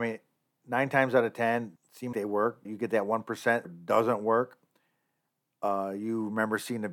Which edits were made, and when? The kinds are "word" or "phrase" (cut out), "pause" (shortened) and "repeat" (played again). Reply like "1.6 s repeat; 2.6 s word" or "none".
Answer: 1.8 s word; 2.1 s word; 2.6 s word; 3.6 s word